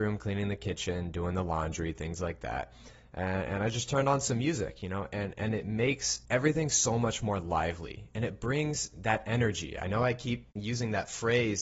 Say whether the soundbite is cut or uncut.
cut